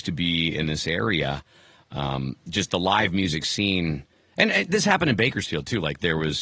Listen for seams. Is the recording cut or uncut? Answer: uncut